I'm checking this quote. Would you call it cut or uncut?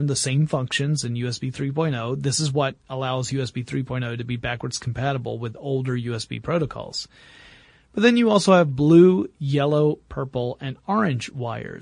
uncut